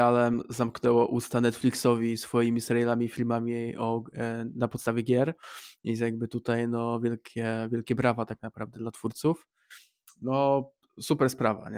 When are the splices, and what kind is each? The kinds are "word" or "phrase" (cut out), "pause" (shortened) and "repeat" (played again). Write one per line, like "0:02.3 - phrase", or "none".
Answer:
0:10.8 - pause